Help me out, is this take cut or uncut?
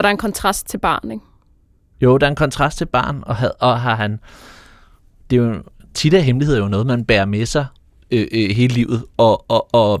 uncut